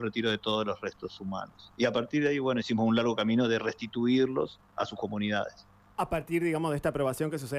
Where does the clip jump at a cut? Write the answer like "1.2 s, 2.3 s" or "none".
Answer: none